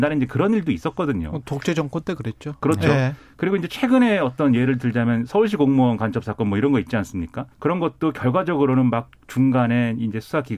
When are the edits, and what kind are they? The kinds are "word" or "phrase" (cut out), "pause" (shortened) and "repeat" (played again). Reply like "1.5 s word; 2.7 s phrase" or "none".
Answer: 7.5 s pause